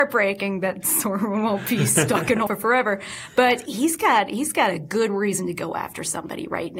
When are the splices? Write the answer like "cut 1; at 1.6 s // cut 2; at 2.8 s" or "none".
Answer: cut 1; at 2.5 s // cut 2; at 3.7 s